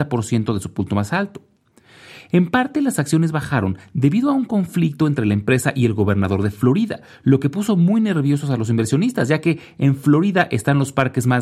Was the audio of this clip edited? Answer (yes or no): no